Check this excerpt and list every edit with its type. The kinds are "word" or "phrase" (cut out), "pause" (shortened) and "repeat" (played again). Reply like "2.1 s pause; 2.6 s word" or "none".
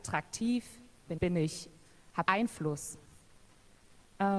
1.2 s word; 2.3 s word